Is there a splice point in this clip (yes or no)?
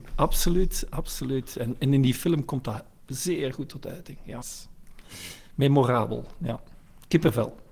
yes